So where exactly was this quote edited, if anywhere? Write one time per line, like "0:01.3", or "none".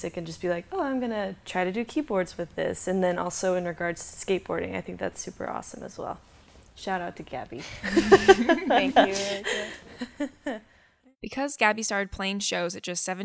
none